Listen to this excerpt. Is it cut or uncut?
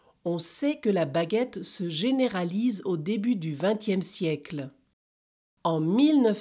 uncut